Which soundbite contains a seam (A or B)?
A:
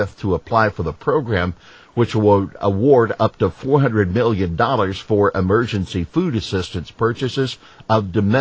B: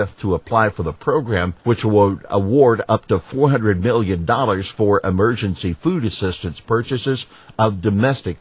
B